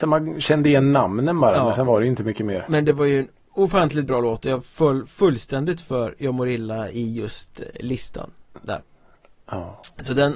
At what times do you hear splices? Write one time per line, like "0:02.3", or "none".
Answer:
none